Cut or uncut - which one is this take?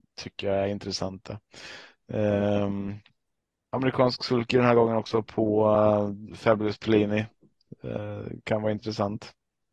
uncut